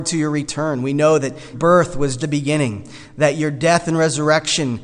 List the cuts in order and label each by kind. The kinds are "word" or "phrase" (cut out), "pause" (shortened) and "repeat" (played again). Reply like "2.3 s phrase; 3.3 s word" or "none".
1.5 s word; 2.2 s word